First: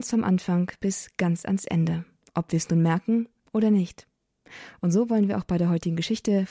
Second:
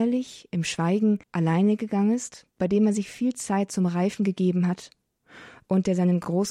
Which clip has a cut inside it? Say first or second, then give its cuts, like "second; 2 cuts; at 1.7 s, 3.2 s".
second; 2 cuts; at 1.2 s, 2.5 s